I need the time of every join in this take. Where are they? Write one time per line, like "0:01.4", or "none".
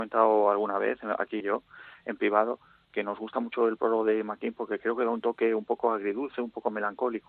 0:01.4